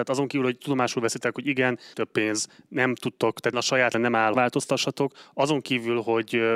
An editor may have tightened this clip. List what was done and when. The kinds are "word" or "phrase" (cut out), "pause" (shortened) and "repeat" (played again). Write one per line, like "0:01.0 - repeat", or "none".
0:01.9 - word
0:03.5 - word
0:03.9 - word
0:04.3 - phrase